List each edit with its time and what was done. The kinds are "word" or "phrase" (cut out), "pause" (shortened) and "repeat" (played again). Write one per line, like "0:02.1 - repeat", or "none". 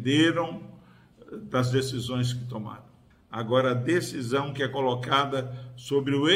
0:03.1 - pause